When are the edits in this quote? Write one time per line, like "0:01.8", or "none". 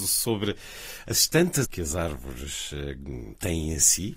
0:01.6